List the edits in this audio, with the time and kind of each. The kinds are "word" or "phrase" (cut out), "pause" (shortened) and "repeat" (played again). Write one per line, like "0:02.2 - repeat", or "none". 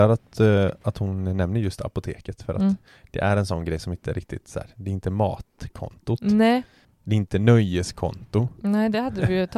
none